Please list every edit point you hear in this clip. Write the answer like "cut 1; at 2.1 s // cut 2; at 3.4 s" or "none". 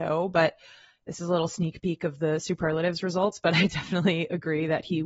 none